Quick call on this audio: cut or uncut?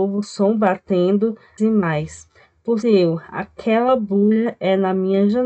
cut